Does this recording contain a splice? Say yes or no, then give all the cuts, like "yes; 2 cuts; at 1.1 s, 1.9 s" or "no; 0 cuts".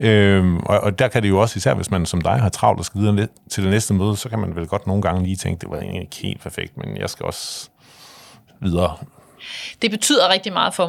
no; 0 cuts